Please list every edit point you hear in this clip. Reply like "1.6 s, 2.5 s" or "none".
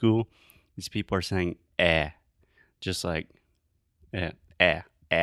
none